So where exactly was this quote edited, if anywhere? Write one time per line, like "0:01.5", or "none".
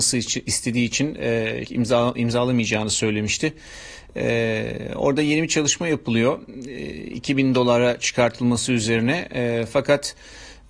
0:01.6